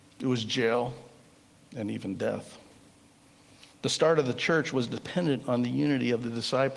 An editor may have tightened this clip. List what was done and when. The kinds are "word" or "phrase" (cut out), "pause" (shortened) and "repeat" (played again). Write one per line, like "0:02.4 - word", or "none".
none